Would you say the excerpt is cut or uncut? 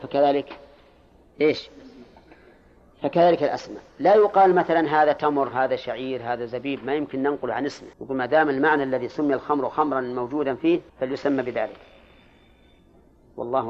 cut